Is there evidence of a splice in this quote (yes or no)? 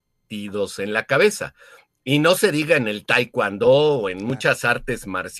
no